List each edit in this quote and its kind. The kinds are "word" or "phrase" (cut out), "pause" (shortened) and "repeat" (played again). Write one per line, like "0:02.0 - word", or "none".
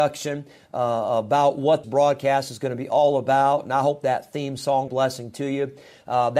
0:01.8 - word
0:04.9 - phrase